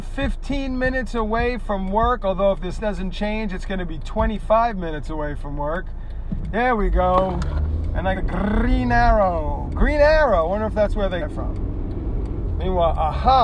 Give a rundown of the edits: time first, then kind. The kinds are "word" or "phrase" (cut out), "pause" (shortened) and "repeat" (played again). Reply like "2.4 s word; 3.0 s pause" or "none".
2.8 s word; 8.1 s word; 11.2 s word